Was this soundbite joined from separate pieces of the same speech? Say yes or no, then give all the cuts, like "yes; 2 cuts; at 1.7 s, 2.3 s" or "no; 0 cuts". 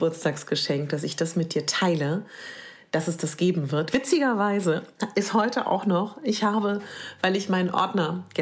no; 0 cuts